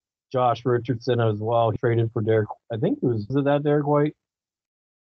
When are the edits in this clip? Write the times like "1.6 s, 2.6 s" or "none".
1.8 s, 3.3 s